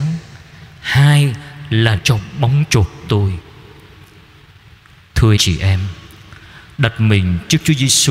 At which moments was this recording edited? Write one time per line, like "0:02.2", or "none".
0:02.0
0:02.7
0:03.1
0:05.4